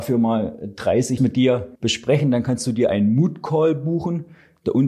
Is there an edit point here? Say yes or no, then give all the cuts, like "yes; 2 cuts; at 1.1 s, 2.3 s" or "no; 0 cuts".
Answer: yes; 2 cuts; at 1.2 s, 1.8 s